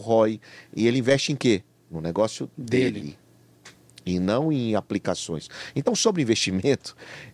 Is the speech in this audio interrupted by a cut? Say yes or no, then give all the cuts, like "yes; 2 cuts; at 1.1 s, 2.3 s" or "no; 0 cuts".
no; 0 cuts